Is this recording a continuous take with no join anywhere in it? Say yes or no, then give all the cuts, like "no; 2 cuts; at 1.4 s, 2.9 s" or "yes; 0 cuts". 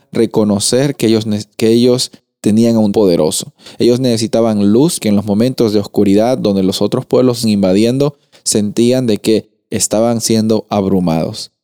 no; 3 cuts; at 2.9 s, 5.0 s, 7.4 s